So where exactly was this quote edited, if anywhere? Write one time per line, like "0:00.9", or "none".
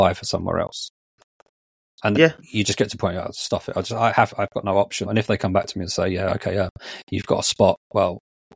0:02.1
0:05.0